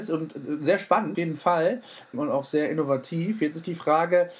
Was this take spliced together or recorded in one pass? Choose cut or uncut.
cut